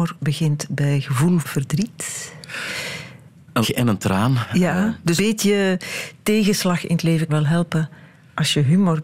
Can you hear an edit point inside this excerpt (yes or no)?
yes